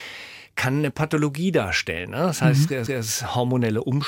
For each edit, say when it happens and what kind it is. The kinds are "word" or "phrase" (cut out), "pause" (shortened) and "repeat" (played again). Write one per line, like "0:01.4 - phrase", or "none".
0:02.9 - repeat